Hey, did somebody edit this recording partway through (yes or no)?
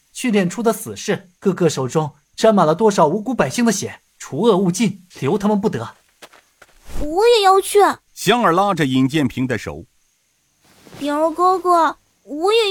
yes